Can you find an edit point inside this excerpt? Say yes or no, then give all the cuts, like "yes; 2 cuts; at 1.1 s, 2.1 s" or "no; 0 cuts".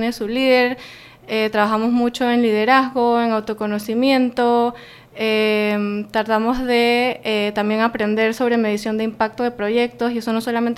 no; 0 cuts